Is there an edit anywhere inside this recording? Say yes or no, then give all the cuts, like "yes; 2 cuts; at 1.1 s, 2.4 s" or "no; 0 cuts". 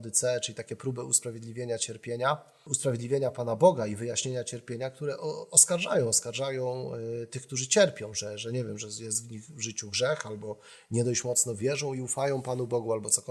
no; 0 cuts